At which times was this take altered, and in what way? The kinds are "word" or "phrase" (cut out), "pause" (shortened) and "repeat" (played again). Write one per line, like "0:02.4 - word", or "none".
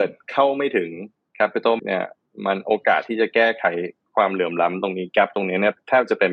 0:01.8 - word